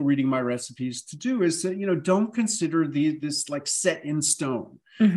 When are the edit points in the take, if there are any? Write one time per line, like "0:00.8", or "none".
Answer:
none